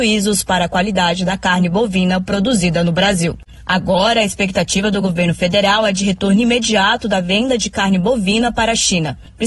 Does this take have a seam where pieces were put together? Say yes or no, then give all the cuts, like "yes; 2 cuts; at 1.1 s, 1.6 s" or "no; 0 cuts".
no; 0 cuts